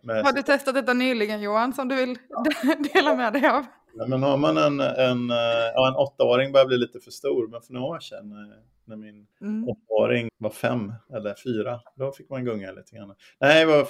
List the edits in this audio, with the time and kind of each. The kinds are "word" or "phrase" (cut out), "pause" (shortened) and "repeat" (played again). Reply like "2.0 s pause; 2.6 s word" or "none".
9.3 s pause; 10.3 s word

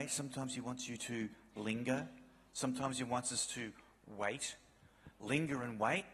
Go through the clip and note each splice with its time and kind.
none

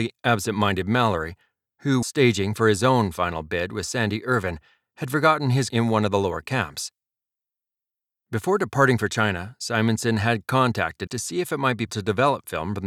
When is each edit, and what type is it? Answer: 2.0 s word; 5.7 s word; 11.1 s word; 11.9 s word

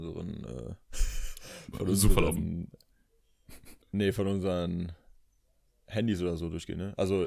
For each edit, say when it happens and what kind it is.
3.8 s pause

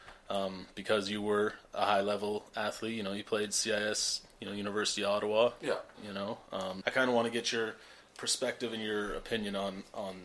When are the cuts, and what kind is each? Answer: 5.9 s pause; 6.8 s word

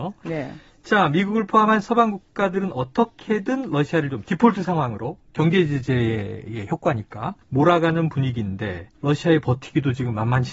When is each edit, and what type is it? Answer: 7.4 s pause; 9.0 s pause

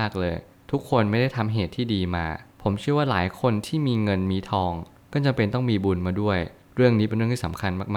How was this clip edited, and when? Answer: none

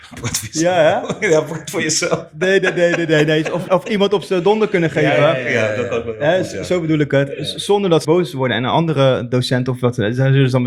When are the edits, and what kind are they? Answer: 3.7 s word; 8.0 s phrase

